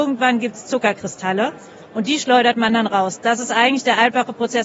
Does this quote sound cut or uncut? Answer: uncut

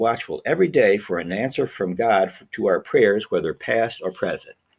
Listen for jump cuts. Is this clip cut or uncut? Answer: uncut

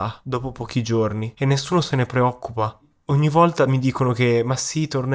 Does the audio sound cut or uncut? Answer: uncut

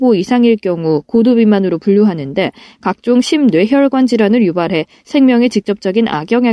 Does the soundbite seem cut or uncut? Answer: uncut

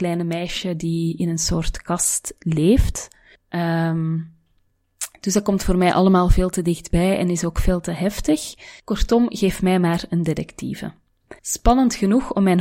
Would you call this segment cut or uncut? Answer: cut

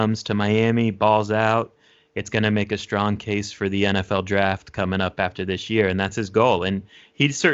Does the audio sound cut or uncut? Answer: uncut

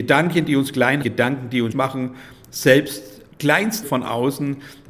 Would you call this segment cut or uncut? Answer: cut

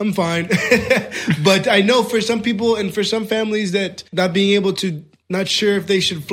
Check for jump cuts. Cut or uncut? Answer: cut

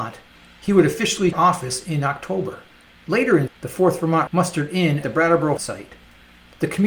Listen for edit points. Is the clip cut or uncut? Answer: cut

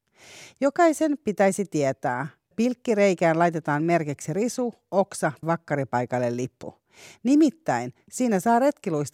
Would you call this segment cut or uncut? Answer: cut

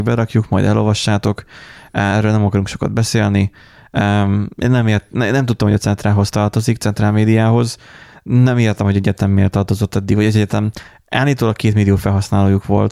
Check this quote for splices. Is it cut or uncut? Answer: uncut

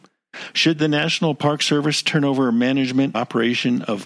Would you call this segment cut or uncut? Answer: cut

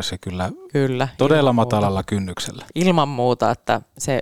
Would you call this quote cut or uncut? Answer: cut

